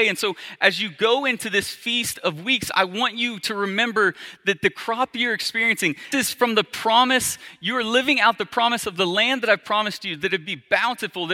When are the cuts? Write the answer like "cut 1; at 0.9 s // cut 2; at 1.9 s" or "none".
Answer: cut 1; at 6.1 s